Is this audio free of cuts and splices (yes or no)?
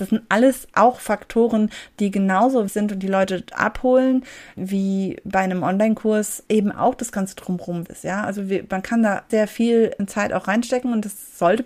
no